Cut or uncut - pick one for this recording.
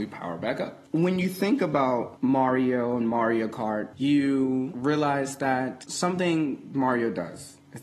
uncut